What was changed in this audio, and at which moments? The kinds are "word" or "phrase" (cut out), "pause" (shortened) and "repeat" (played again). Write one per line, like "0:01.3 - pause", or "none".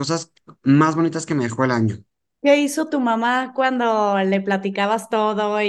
none